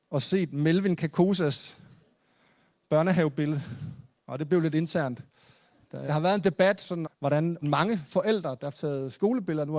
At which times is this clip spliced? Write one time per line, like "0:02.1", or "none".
0:06.1
0:07.0
0:07.6
0:08.7